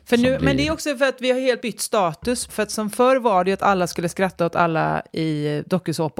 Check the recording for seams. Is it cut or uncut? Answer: cut